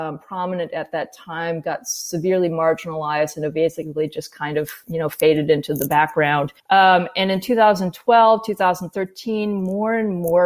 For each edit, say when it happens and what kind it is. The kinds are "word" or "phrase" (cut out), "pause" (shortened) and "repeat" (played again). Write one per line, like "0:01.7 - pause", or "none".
0:06.6 - pause